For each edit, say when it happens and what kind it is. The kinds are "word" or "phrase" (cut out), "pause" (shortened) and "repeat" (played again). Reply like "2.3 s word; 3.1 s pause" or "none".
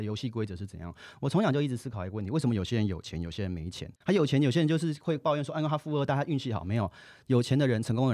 4.0 s pause